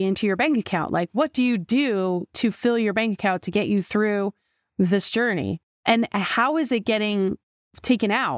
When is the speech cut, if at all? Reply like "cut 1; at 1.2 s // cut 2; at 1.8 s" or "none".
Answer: none